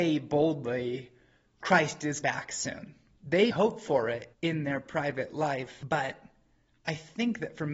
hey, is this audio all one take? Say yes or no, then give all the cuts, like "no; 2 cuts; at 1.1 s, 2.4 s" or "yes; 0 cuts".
no; 3 cuts; at 2.2 s, 3.5 s, 4.3 s